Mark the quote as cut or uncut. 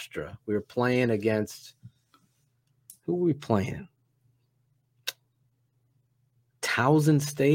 uncut